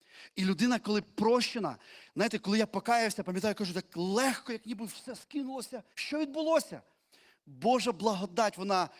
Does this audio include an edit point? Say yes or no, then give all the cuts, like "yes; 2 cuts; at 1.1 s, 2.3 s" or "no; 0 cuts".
yes; 1 cut; at 5.9 s